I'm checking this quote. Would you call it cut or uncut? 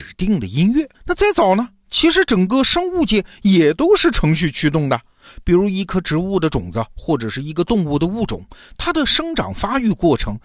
cut